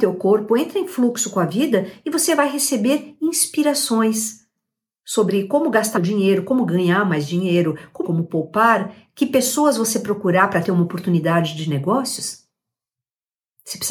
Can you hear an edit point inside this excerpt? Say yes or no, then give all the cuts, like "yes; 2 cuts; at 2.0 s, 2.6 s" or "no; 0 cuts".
yes; 2 cuts; at 5.9 s, 8.0 s